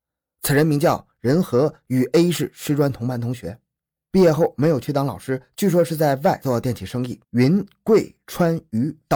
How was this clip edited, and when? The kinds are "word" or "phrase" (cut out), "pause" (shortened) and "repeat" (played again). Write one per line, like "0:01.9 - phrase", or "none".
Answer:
0:07.2 - pause